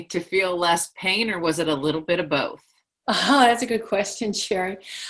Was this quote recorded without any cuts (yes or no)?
yes